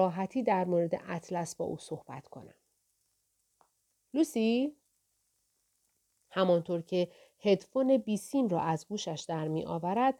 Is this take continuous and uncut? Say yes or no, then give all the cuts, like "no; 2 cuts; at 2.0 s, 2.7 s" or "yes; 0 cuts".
yes; 0 cuts